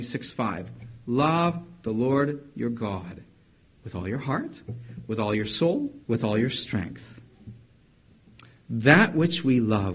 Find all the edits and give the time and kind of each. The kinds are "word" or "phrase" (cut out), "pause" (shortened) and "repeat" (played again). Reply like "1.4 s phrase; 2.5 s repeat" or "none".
6.0 s pause